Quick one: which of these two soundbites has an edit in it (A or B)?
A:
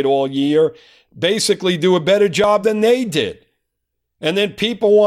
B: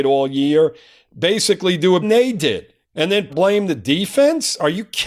B